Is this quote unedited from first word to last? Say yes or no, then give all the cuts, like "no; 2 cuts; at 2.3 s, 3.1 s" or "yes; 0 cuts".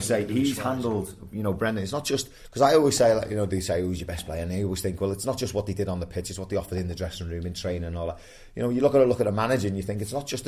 yes; 0 cuts